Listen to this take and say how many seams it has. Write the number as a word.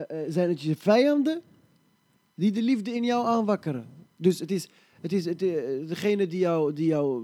zero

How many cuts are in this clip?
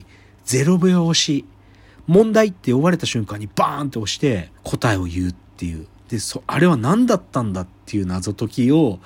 one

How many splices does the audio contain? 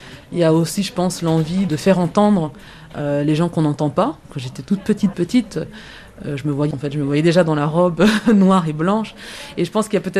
three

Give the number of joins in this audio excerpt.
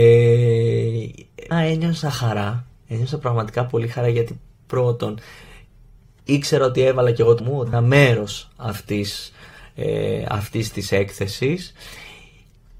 three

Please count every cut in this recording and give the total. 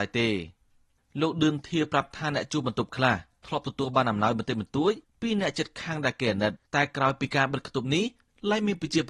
one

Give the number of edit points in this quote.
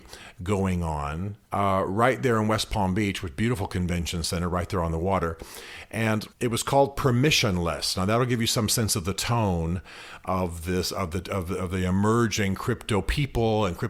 two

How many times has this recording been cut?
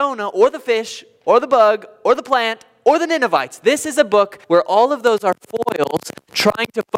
one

